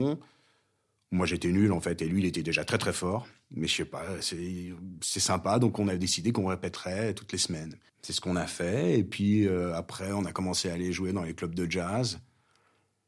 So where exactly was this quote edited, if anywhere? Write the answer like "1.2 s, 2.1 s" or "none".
7.9 s